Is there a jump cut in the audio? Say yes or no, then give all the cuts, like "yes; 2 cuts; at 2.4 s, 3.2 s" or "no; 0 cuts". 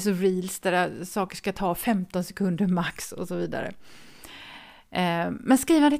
no; 0 cuts